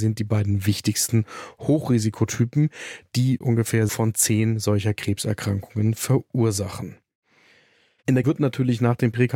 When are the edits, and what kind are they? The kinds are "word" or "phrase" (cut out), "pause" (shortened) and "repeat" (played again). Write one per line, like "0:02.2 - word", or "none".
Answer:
0:03.4 - word
0:03.9 - word
0:08.2 - word